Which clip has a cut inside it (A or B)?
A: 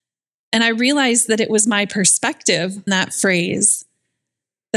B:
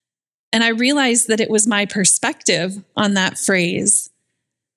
A